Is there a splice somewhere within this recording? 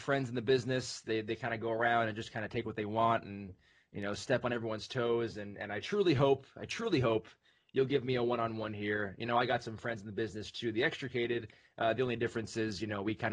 no; 0 cuts

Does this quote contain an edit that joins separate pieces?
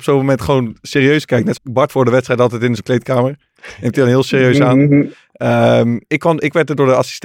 yes; 4 cuts; at 1.5 s, 1.9 s, 2.8 s, 6.1 s

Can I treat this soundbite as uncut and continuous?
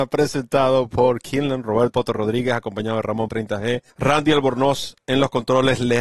no; 3 cuts; at 1.9 s, 3.3 s, 3.9 s

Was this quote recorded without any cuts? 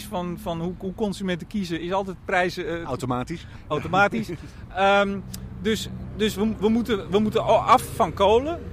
yes; 0 cuts

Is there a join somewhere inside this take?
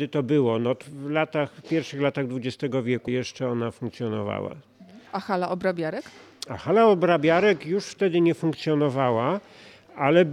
yes; 1 cut; at 5.1 s

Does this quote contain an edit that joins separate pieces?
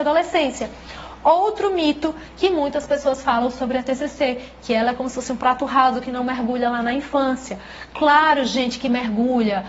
no; 0 cuts

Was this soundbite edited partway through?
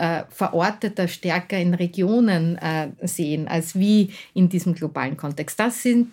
no; 0 cuts

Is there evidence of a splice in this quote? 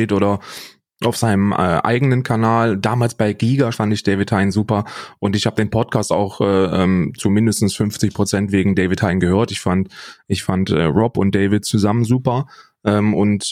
yes; 2 cuts; at 3.7 s, 7.2 s

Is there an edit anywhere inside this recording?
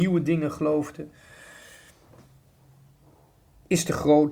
no; 0 cuts

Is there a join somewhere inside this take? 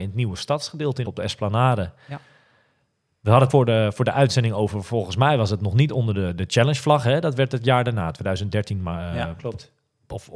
yes; 2 cuts; at 1.0 s, 3.5 s

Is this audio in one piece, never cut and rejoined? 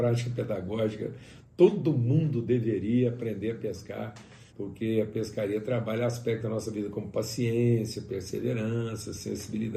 no; 1 cut; at 4.5 s

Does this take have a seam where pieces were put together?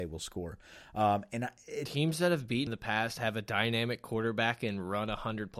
yes; 1 cut; at 2.7 s

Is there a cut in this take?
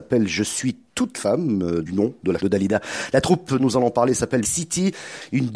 yes; 5 cuts; at 1.1 s, 1.9 s, 2.4 s, 3.6 s, 4.4 s

